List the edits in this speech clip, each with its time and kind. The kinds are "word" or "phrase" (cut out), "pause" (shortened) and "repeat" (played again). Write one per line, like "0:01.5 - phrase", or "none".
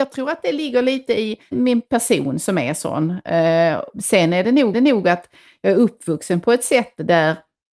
0:01.5 - phrase
0:04.7 - repeat